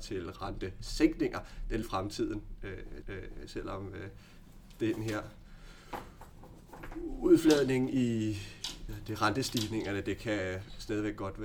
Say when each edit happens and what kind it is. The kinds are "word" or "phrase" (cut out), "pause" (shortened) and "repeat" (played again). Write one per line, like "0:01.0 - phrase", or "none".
0:01.8 - phrase
0:03.0 - repeat
0:08.9 - phrase